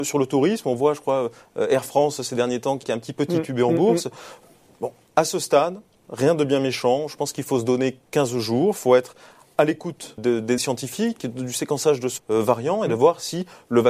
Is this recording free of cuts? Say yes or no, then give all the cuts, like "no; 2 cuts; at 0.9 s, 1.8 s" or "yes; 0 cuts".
no; 4 cuts; at 2.8 s, 10.2 s, 10.6 s, 12.2 s